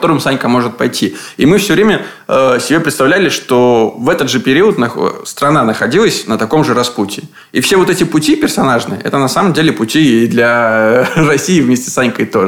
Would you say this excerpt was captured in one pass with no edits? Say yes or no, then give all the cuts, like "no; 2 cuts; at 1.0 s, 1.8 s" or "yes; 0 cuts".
yes; 0 cuts